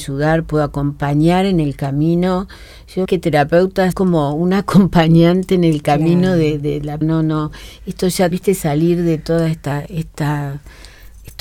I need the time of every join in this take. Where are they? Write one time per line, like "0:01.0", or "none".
0:03.0
0:03.9
0:07.0
0:08.3